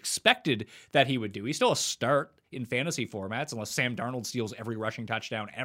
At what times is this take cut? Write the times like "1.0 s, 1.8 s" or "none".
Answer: none